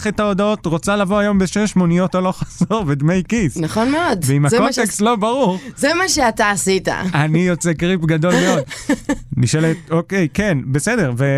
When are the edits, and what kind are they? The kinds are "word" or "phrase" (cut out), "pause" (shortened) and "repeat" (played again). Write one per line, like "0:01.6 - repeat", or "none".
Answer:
none